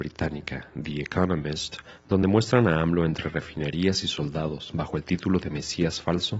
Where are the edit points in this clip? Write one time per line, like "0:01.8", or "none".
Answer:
none